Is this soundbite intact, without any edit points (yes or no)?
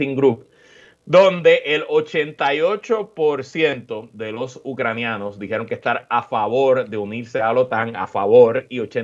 yes